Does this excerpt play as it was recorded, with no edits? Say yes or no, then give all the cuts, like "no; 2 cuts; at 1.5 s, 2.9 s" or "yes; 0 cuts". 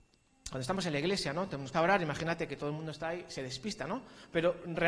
no; 1 cut; at 1.7 s